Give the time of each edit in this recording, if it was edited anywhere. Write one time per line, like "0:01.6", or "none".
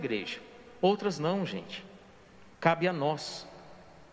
none